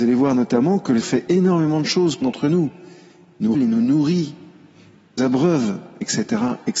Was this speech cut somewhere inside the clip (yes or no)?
yes